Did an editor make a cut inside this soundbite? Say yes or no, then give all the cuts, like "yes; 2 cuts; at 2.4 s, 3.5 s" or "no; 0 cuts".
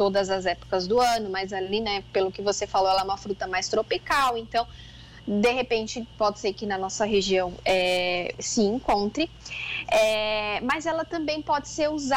no; 0 cuts